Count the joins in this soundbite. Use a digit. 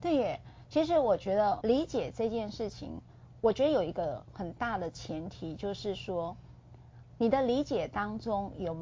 1